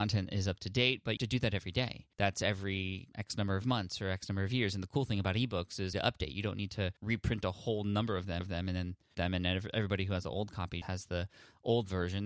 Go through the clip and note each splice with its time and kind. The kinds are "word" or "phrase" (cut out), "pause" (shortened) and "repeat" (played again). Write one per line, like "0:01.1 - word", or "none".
0:01.2 - phrase
0:02.1 - pause
0:03.1 - pause
0:05.9 - phrase
0:07.0 - pause
0:08.4 - repeat
0:09.1 - word
0:10.8 - word